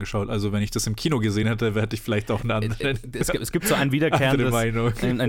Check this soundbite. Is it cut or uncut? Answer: uncut